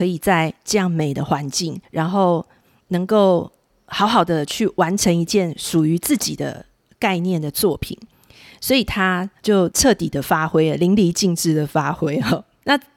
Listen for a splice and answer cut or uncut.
uncut